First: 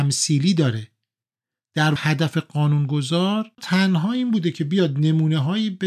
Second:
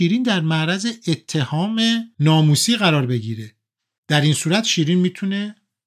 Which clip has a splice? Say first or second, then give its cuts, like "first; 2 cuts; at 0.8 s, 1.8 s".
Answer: first; 1 cut; at 2.0 s